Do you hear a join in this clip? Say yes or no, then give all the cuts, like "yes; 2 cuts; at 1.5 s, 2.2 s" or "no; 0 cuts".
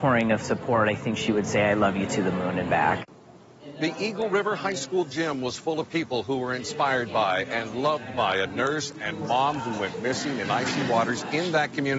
no; 0 cuts